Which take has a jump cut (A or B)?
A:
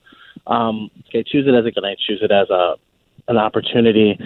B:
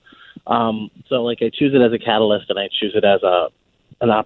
A